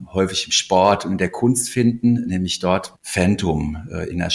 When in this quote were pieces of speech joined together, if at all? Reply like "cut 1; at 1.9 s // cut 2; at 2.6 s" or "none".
cut 1; at 2.9 s